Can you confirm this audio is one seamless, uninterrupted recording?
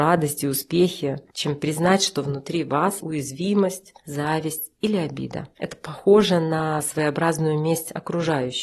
no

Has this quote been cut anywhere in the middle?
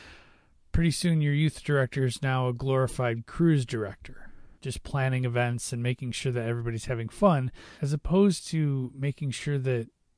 yes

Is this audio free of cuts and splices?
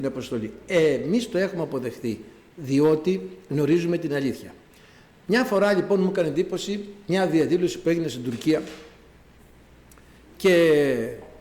yes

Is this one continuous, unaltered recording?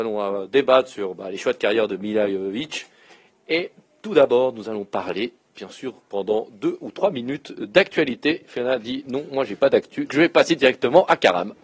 no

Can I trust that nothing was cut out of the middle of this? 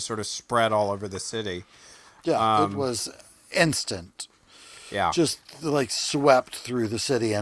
yes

